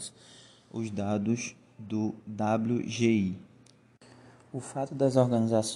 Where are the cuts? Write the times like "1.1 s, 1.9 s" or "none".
none